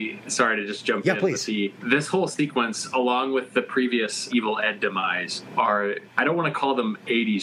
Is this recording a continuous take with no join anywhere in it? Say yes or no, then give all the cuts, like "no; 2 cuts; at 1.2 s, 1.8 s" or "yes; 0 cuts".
no; 1 cut; at 4.3 s